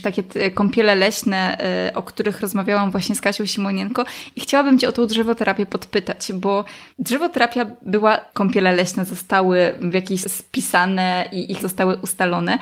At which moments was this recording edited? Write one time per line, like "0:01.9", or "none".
0:06.9
0:08.3
0:10.2
0:11.6